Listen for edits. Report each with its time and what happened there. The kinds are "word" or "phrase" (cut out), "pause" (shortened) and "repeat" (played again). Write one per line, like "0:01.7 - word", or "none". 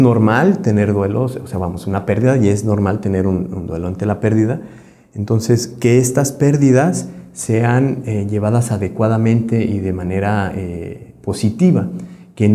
none